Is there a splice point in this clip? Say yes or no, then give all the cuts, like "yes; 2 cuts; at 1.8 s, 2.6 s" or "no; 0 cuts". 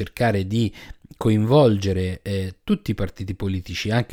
no; 0 cuts